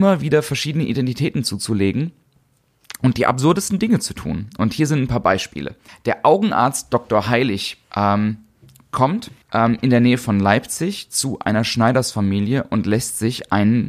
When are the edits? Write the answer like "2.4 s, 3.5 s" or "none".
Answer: 5.9 s, 7.8 s, 9.4 s

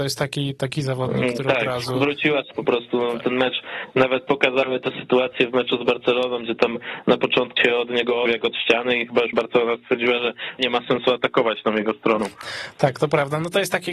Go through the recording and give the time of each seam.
2.5 s, 7.6 s, 8.3 s, 9.3 s, 10.6 s

